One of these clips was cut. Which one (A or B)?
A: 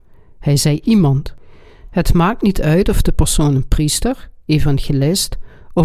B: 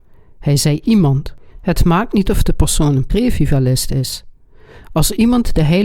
B